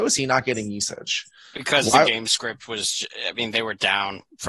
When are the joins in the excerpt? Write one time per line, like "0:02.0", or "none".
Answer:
none

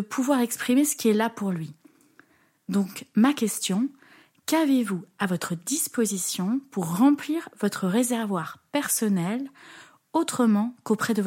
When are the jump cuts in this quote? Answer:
none

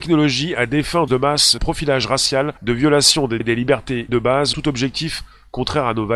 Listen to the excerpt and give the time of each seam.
0:01.1
0:01.6
0:02.6
0:03.4
0:04.1
0:04.5

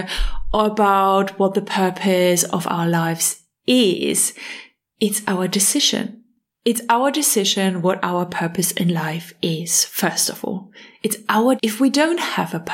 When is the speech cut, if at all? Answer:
0:11.6

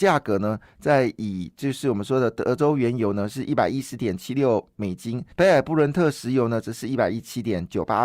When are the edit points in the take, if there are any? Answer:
0:05.3

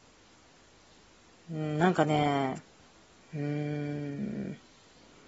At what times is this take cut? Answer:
none

